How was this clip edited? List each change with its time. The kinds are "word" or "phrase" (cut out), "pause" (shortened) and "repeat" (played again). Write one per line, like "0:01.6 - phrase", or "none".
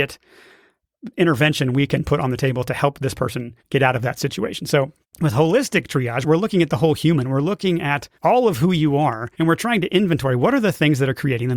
0:03.6 - pause
0:05.0 - pause
0:06.2 - phrase
0:08.1 - pause
0:09.3 - pause